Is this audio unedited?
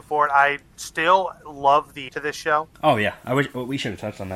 no; 2 cuts; at 2.1 s, 2.7 s

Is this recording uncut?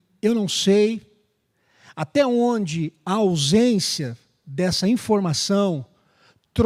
yes; 0 cuts

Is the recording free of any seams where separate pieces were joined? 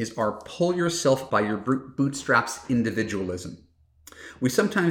no; 1 cut; at 1.3 s

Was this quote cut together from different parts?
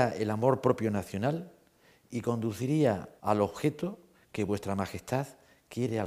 yes; 1 cut; at 3.2 s

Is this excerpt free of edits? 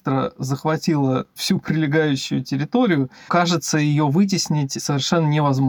no; 1 cut; at 3.3 s

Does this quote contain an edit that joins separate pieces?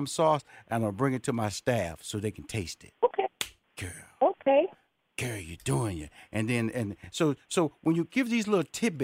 no; 0 cuts

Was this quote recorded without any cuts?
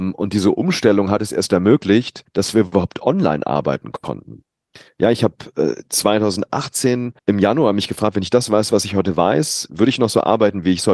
no; 2 cuts; at 2.3 s, 7.2 s

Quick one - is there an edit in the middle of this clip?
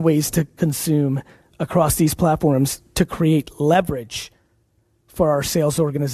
no; 0 cuts

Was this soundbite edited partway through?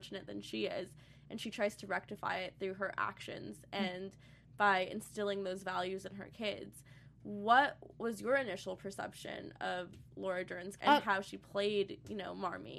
yes; 1 cut; at 10.8 s

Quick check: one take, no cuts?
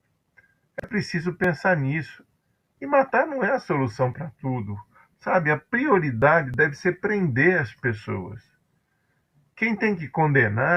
yes; 0 cuts

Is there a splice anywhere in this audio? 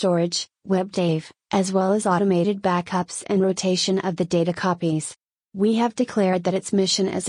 no; 0 cuts

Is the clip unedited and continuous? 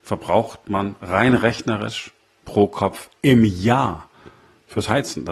yes; 0 cuts

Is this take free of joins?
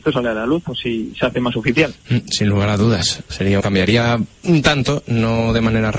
no; 2 cuts; at 3.6 s, 4.3 s

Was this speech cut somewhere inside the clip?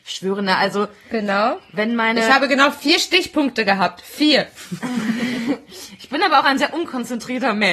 no; 0 cuts

